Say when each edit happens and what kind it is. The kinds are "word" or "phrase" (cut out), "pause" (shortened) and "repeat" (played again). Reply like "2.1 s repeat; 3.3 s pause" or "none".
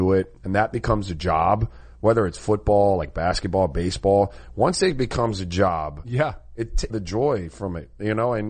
6.9 s phrase